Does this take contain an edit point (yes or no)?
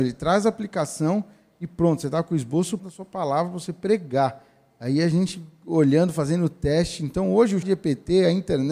yes